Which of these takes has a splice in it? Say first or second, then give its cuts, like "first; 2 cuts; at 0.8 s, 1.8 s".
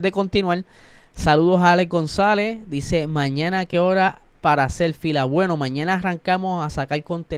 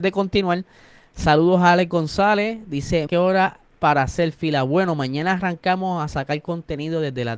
second; 1 cut; at 3.1 s